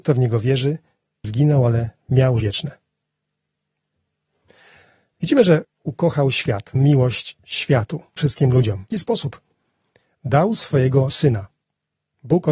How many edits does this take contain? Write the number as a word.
seven